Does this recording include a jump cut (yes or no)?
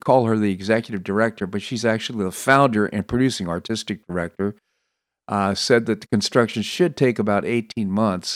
no